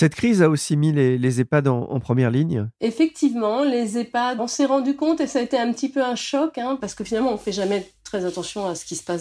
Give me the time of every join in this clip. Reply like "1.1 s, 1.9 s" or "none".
4.4 s